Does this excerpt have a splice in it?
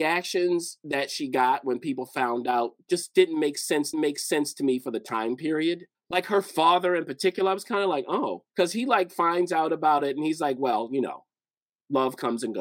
yes; 3 cuts; at 3.9 s, 5.9 s, 8.5 s

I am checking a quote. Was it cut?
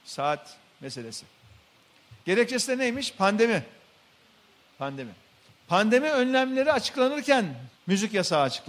yes; 3 cuts; at 2.2 s, 5.5 s, 7.7 s

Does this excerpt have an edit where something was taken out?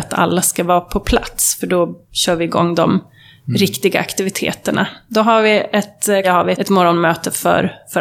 yes; 3 cuts; at 2.0 s, 6.2 s, 6.5 s

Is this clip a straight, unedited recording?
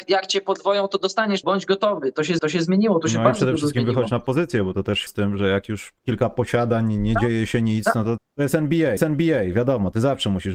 no; 5 cuts; at 1.4 s, 2.4 s, 5.1 s, 8.2 s, 9.0 s

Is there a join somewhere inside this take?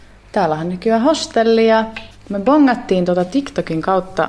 no; 0 cuts

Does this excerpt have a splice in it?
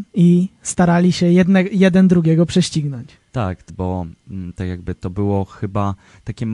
yes; 2 cuts; at 3.3 s, 3.7 s

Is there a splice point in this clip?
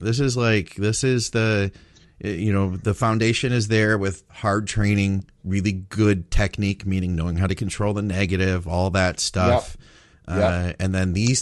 no; 0 cuts

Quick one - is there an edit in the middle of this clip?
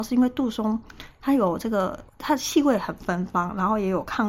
yes; 1 cut; at 2.1 s

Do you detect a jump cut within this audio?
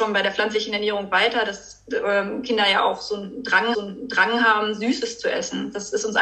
yes; 1 cut; at 3.7 s

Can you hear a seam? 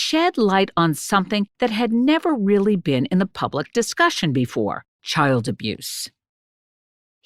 yes; 1 cut; at 4.9 s

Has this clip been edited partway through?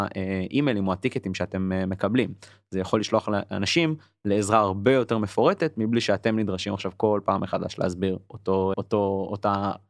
yes; 1 cut; at 8.7 s

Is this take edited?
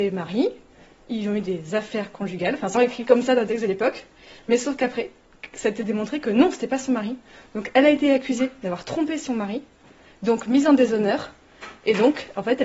yes; 1 cut; at 2.7 s

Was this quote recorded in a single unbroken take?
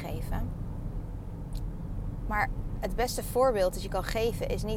yes; 0 cuts

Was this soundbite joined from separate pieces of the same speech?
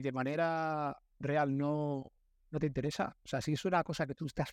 no; 0 cuts

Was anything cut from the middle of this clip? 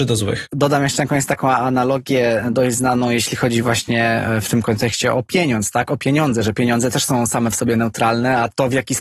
no; 0 cuts

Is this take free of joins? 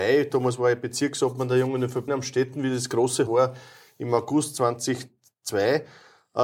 no; 2 cuts; at 2.1 s, 3.3 s

